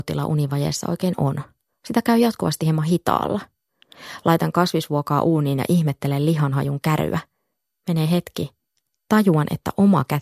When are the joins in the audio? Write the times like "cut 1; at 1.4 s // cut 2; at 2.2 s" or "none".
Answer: cut 1; at 1.7 s